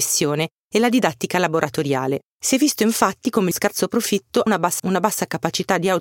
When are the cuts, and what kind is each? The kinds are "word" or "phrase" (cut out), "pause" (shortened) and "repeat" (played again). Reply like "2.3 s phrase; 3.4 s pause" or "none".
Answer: 2.3 s pause; 3.5 s phrase; 4.5 s word; 4.8 s word